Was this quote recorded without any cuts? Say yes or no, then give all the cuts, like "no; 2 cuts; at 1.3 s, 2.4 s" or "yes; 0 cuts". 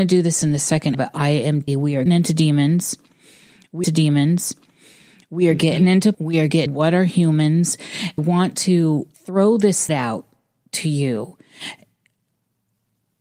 no; 9 cuts; at 0.9 s, 1.7 s, 2.1 s, 3.8 s, 6.1 s, 6.7 s, 8.2 s, 9.1 s, 9.9 s